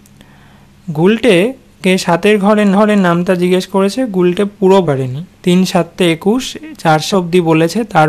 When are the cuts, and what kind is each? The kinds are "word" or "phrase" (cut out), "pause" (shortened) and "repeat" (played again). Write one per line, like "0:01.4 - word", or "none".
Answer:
0:02.7 - repeat
0:04.8 - word
0:05.3 - pause
0:07.1 - phrase